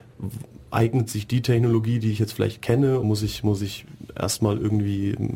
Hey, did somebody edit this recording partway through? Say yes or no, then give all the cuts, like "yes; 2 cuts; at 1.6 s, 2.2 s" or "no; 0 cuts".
yes; 1 cut; at 3.0 s